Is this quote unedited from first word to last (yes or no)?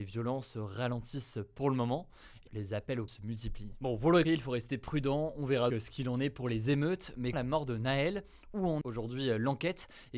no